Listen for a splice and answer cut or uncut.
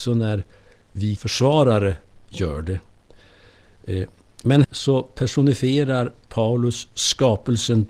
cut